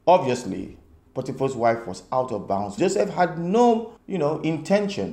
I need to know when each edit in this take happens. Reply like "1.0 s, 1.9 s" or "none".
2.8 s, 4.0 s